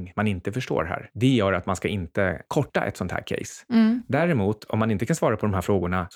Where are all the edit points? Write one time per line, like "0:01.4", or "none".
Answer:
none